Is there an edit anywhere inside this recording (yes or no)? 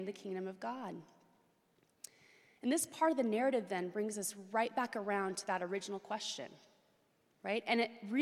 no